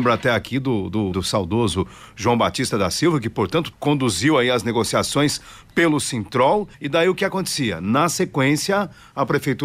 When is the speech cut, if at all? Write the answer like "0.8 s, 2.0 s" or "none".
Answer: 1.1 s, 3.7 s, 6.7 s